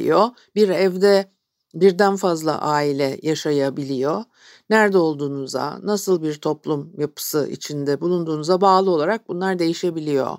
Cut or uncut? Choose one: uncut